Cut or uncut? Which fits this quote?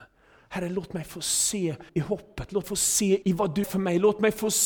cut